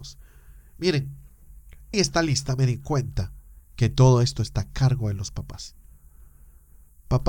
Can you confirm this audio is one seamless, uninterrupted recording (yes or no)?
no